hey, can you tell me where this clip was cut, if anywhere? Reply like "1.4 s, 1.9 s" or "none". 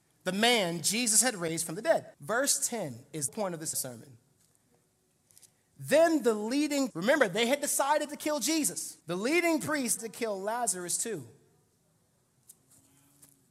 2.1 s, 3.3 s, 3.7 s, 6.9 s, 9.0 s, 10.0 s

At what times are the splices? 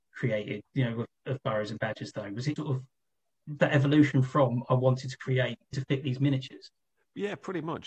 2.6 s, 3.6 s, 5.7 s

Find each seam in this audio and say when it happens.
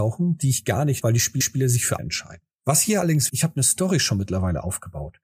1.0 s, 1.4 s, 2.0 s, 2.5 s, 3.3 s

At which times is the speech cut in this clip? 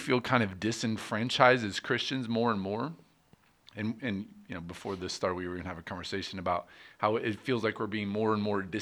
none

